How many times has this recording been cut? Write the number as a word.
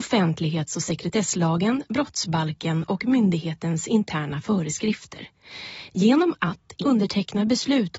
one